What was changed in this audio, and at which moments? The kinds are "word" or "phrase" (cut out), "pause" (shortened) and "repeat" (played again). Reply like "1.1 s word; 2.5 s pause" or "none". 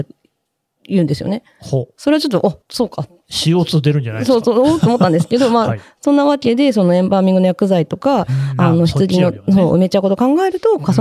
2.6 s word